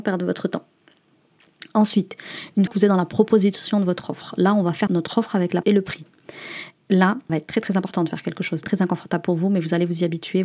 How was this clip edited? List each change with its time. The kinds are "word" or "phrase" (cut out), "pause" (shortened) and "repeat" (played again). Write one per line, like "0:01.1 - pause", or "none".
0:02.7 - word
0:04.9 - word
0:05.6 - word
0:07.3 - word
0:08.6 - word